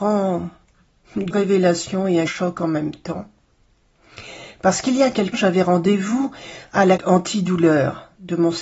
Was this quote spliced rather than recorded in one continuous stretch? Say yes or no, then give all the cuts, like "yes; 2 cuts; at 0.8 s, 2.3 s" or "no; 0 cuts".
yes; 4 cuts; at 1.3 s, 2.3 s, 5.3 s, 7.0 s